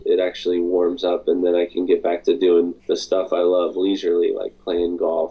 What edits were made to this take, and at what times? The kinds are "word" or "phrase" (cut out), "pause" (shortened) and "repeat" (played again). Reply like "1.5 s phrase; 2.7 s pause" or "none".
2.8 s pause